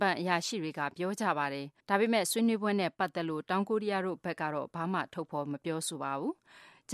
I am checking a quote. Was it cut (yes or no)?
yes